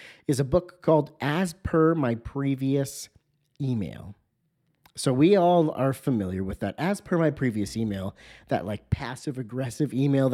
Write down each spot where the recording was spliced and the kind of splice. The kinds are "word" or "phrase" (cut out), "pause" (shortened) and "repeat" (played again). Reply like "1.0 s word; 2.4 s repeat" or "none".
none